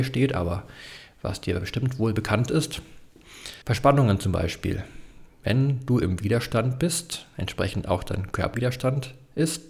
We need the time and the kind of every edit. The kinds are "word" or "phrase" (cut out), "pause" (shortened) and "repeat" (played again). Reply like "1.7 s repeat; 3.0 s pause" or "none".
3.6 s pause; 8.5 s word